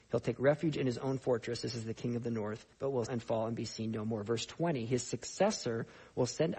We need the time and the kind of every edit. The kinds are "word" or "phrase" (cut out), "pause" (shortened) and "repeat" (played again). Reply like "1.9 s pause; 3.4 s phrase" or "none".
2.7 s pause; 3.1 s word